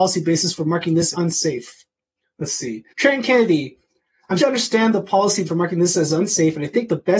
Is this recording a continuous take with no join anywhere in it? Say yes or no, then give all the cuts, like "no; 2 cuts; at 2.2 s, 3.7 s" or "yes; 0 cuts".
no; 5 cuts; at 1.1 s, 2.2 s, 2.9 s, 4.4 s, 5.5 s